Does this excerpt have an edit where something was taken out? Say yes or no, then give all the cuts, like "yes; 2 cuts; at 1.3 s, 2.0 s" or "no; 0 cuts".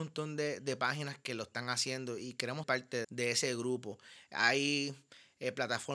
yes; 2 cuts; at 2.6 s, 3.0 s